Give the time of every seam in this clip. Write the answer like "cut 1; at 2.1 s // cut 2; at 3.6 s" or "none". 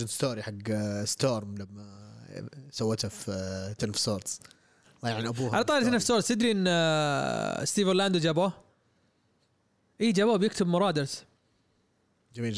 none